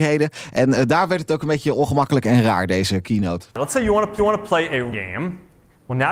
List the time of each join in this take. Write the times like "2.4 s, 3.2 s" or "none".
3.5 s, 4.2 s, 4.9 s